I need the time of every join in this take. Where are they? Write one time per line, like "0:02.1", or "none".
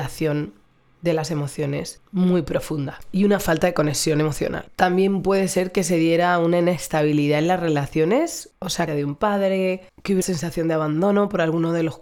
0:02.1
0:08.9
0:10.2